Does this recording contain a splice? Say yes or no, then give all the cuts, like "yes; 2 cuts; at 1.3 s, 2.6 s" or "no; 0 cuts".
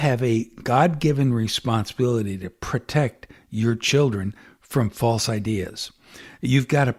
no; 0 cuts